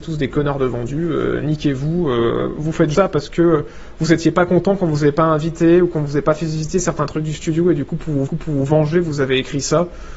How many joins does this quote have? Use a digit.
2